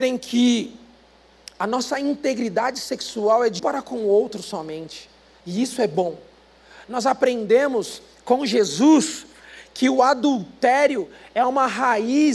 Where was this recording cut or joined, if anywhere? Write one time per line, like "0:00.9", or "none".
0:03.6